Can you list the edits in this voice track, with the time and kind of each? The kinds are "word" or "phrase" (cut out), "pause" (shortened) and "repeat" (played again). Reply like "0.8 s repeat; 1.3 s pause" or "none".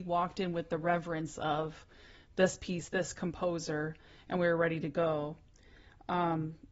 none